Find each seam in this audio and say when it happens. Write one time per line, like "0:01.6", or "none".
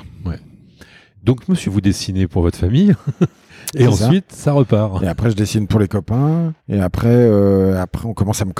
0:01.7
0:06.6